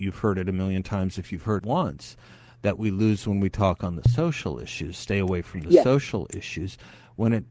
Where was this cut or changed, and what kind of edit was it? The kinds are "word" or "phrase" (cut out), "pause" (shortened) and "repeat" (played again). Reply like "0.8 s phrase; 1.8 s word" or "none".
1.6 s word